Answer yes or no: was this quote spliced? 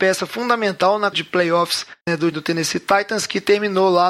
yes